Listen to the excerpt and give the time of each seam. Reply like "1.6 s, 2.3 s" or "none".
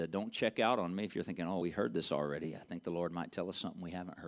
1.6 s